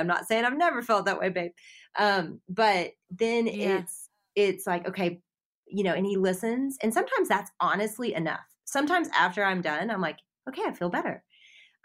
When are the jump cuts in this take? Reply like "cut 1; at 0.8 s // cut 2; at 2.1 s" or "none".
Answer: none